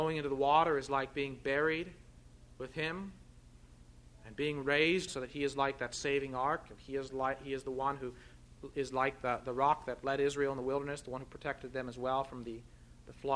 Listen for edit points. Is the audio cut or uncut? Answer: cut